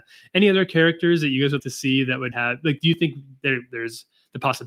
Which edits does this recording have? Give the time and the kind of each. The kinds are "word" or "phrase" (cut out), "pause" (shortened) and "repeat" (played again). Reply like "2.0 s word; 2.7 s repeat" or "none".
1.6 s word; 2.3 s word